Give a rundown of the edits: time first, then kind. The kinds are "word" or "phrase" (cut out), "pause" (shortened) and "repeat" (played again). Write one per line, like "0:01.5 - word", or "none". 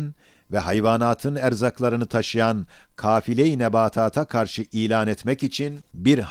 none